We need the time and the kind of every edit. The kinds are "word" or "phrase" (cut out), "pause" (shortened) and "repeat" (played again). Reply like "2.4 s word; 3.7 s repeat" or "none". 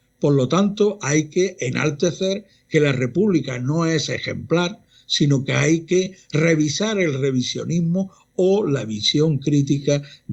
none